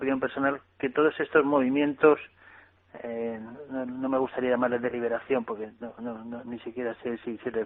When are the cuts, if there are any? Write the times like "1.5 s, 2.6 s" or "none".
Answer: none